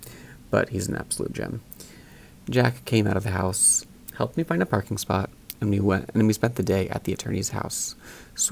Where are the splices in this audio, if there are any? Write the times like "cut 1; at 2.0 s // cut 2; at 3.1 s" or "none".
none